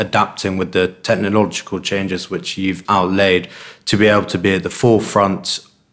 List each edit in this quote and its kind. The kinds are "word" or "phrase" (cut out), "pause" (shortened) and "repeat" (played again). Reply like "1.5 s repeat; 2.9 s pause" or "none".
2.8 s word